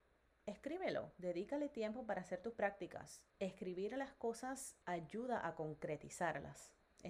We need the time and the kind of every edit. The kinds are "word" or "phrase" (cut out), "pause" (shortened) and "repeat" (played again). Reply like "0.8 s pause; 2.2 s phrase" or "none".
3.3 s pause; 4.8 s pause